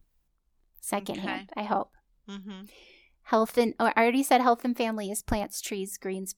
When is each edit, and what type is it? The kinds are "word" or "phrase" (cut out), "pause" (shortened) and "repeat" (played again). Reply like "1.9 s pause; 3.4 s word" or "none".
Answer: none